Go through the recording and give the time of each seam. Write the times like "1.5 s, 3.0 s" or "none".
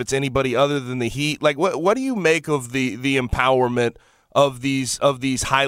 none